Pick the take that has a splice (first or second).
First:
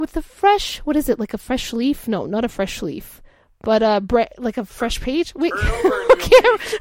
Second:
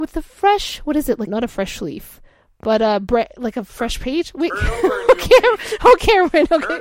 second